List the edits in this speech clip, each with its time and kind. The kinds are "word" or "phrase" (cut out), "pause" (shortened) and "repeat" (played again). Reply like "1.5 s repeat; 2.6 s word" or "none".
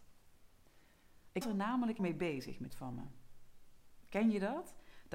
1.4 s word; 2.0 s word; 2.7 s phrase